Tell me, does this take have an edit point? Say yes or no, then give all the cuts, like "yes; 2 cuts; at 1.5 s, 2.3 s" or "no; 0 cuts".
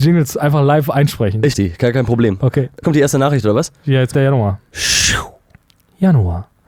yes; 3 cuts; at 1.5 s, 2.8 s, 4.1 s